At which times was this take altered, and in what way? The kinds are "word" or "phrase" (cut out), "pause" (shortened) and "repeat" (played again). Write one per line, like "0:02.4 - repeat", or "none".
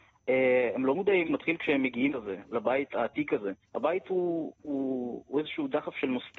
0:01.2 - phrase
0:02.1 - word
0:03.6 - pause